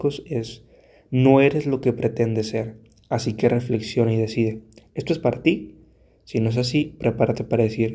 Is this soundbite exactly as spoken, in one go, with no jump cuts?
yes; 0 cuts

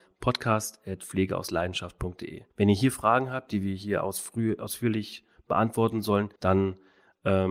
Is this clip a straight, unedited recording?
no; 2 cuts; at 2.5 s, 6.4 s

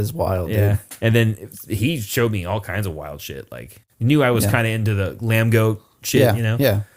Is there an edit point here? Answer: no; 0 cuts

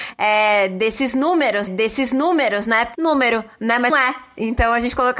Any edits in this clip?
yes; 3 cuts; at 1.7 s, 2.9 s, 3.9 s

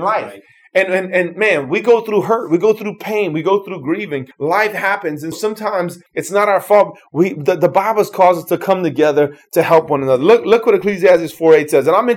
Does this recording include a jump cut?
yes; 3 cuts; at 4.3 s, 5.3 s, 6.1 s

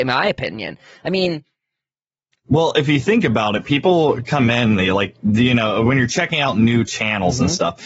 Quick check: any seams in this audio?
no; 0 cuts

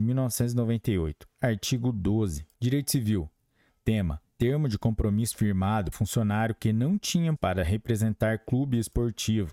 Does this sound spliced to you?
yes; 4 cuts; at 2.5 s, 4.3 s, 5.9 s, 7.4 s

